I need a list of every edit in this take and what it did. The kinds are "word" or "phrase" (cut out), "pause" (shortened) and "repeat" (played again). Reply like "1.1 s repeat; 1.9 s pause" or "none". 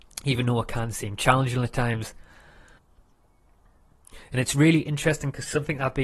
none